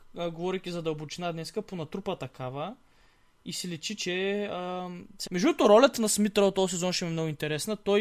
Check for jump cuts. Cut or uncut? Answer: cut